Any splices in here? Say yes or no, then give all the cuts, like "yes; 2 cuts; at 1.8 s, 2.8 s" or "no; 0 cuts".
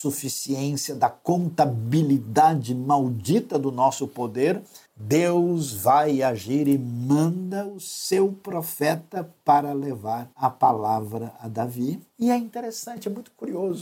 yes; 3 cuts; at 4.8 s, 10.3 s, 12.1 s